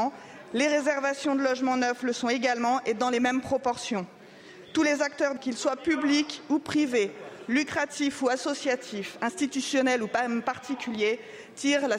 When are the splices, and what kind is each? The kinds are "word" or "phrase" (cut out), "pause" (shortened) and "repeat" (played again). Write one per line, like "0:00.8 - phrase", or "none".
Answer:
0:05.4 - word